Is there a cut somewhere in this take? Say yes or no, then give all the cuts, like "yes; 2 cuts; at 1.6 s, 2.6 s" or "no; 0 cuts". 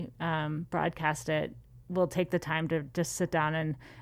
no; 0 cuts